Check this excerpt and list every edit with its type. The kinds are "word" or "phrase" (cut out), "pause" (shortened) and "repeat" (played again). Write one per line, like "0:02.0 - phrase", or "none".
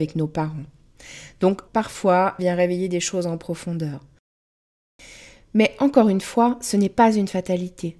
0:01.7 - word
0:02.4 - word